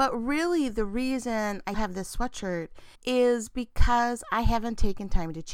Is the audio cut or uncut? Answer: cut